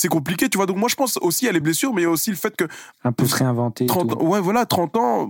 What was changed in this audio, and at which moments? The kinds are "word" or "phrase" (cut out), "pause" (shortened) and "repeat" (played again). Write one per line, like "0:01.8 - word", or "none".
none

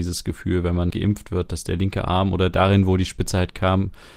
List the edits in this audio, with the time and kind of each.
0:00.9 - word

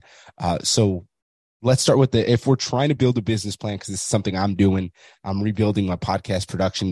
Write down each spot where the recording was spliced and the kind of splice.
none

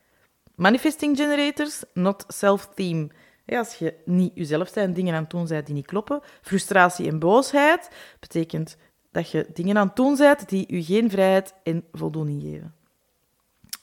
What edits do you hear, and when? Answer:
none

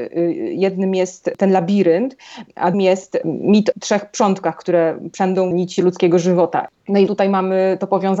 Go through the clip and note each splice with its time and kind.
0:02.7 - word
0:03.7 - word
0:05.5 - word
0:07.1 - word

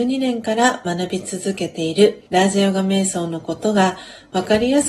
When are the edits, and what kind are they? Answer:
0:02.3 - pause

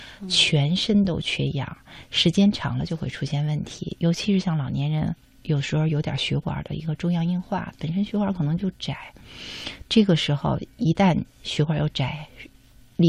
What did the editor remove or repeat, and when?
0:05.2 - pause

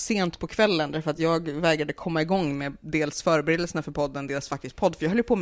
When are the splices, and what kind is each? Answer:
none

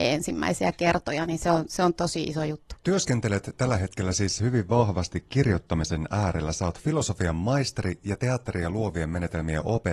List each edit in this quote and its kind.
none

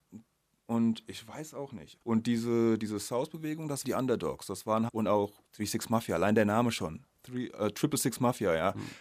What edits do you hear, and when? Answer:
0:02.0 - pause
0:03.8 - phrase
0:04.9 - word
0:05.5 - pause

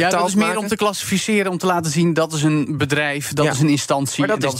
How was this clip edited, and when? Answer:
none

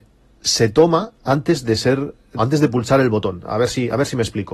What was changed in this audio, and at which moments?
0:02.4 - word

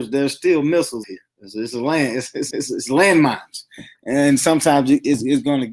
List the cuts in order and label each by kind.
0:01.0 - word
0:02.5 - repeat

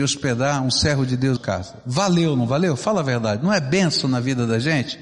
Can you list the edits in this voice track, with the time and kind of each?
0:01.4 - phrase

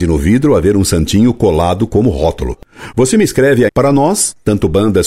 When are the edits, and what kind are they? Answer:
0:03.7 - word

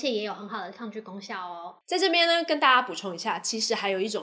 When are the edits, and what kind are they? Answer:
0:01.8 - pause

